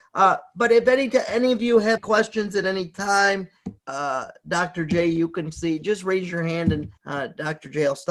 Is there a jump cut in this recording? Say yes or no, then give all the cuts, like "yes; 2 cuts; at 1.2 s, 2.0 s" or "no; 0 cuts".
yes; 3 cuts; at 2.0 s, 3.8 s, 7.0 s